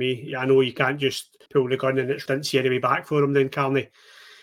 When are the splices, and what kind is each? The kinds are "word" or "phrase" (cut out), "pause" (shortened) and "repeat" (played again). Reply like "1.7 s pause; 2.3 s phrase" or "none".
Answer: 1.5 s pause; 2.3 s phrase

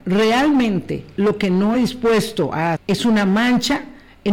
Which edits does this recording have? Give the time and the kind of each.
1.7 s word; 2.7 s word

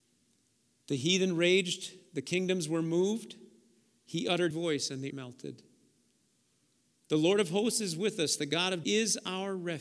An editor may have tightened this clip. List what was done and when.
4.5 s word; 5.1 s word; 8.8 s word

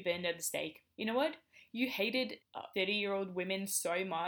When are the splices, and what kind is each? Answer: 0.9 s pause; 2.4 s word; 2.7 s word

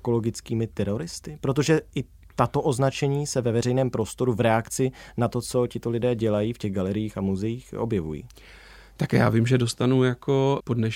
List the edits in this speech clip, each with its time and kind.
none

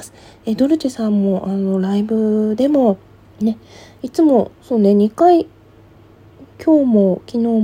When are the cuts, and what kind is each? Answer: 3.2 s pause; 4.6 s pause; 6.5 s pause

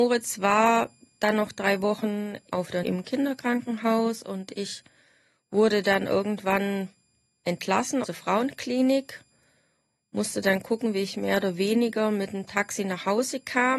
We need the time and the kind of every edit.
2.5 s word; 2.8 s word; 8.0 s word

